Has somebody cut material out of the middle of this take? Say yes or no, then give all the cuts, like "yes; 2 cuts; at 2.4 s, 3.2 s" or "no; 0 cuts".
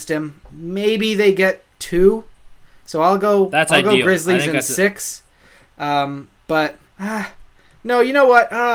yes; 1 cut; at 6.9 s